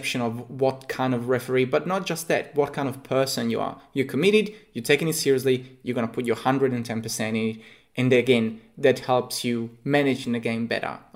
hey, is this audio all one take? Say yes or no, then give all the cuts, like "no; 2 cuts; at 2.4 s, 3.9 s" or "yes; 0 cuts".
yes; 0 cuts